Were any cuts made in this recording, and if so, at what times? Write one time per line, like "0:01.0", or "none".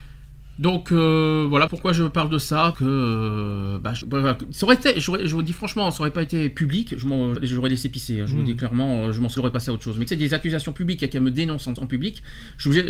0:01.7
0:02.7
0:04.0
0:07.4
0:09.4
0:10.1
0:11.8